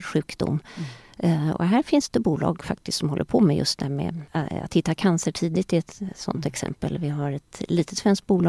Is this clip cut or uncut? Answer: cut